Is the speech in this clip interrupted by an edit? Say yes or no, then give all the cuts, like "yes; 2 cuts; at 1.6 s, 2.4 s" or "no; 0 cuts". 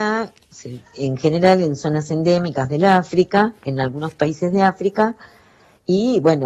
no; 0 cuts